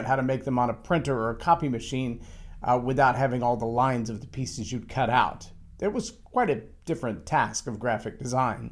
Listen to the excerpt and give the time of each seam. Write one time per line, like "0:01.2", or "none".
none